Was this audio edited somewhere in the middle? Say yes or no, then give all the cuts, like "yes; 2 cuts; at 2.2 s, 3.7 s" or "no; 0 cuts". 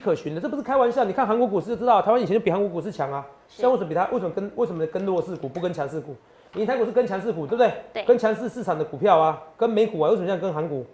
yes; 1 cut; at 7.5 s